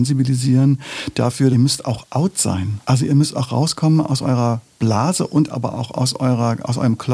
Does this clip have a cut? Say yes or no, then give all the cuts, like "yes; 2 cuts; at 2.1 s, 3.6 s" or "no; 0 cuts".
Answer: yes; 2 cuts; at 1.5 s, 2.8 s